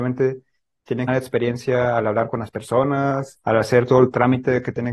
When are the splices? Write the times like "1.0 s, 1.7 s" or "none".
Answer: 1.1 s, 3.4 s